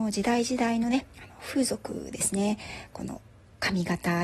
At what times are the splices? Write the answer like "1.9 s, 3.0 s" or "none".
1.1 s